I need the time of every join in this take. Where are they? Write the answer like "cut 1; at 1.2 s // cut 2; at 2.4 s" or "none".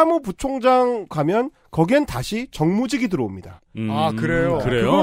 cut 1; at 1.1 s